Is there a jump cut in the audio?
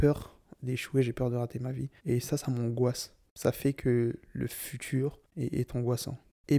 yes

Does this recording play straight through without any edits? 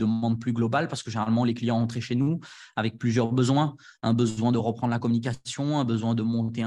yes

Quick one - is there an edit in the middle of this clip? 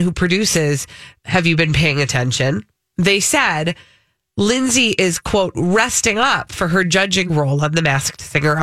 no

